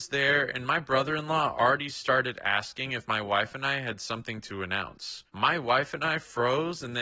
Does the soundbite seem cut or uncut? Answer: cut